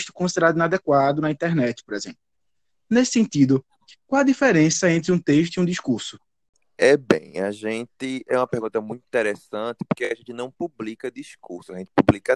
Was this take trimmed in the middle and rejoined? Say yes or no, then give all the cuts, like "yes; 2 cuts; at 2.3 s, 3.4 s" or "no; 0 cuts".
no; 0 cuts